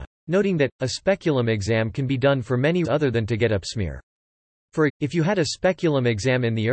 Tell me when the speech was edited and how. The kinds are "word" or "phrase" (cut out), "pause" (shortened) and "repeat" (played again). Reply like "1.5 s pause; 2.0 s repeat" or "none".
2.8 s word; 3.6 s word; 4.9 s word

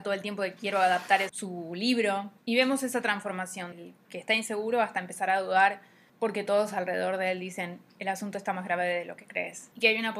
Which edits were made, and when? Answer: 1.3 s word; 3.7 s word; 6.1 s pause

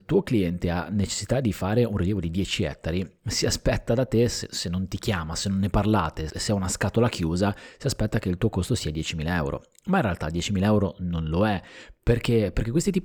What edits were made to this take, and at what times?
6.3 s word

